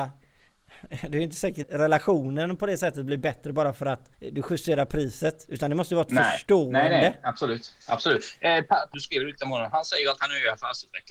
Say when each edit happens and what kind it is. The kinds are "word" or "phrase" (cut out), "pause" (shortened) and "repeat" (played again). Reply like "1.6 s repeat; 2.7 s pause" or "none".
1.6 s word; 4.1 s pause; 7.8 s pause; 8.9 s phrase